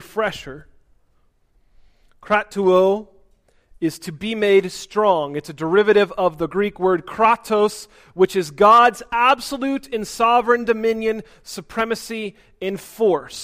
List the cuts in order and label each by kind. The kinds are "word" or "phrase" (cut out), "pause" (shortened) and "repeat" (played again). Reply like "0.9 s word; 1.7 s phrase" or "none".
none